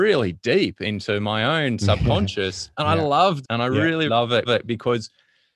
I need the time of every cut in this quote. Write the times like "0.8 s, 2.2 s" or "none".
2.7 s, 3.4 s, 4.1 s, 4.4 s

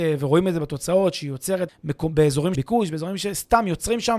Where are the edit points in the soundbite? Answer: 1.7 s, 2.5 s

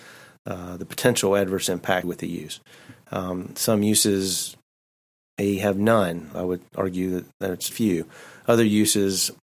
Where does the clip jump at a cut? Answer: 2.0 s, 6.3 s, 7.7 s

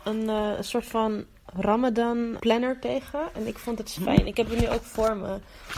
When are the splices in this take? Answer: 2.4 s, 4.0 s

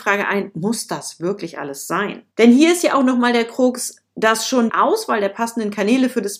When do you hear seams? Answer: 2.3 s, 4.7 s

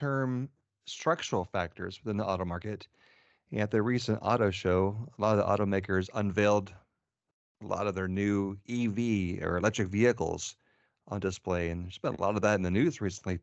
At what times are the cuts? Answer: none

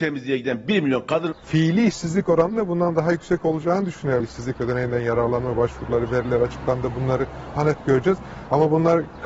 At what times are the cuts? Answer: 7.6 s

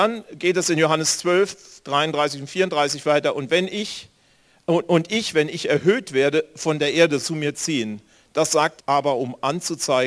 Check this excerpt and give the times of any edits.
7.2 s, 8.8 s

